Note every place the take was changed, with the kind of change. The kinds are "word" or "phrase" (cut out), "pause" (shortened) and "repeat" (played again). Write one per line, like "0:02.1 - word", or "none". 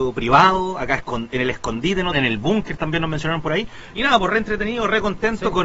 0:02.1 - word